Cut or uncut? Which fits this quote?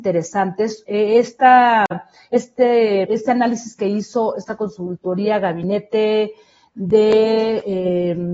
cut